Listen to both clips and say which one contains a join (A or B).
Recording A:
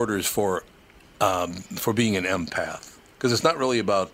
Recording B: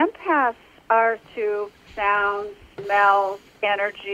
B